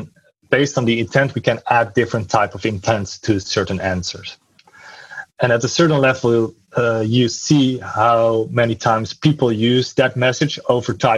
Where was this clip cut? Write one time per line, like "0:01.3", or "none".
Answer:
0:05.3